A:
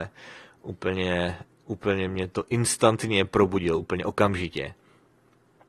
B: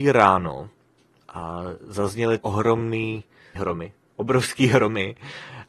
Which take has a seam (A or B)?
B